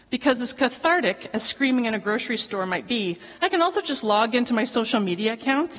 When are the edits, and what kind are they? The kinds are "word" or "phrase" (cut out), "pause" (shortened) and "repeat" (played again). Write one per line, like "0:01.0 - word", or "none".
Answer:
0:03.3 - pause